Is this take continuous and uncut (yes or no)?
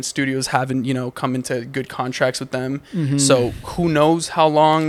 yes